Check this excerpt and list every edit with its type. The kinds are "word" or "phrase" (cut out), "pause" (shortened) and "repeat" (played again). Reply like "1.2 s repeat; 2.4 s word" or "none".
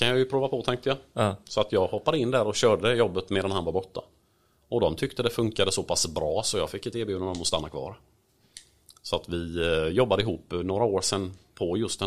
none